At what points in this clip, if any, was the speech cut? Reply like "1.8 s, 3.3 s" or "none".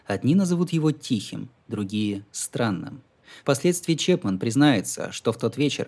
3.4 s